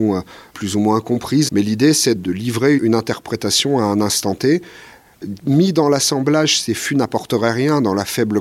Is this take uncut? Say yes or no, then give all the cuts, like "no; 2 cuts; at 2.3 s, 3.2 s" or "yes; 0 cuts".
no; 3 cuts; at 1.5 s, 2.2 s, 2.8 s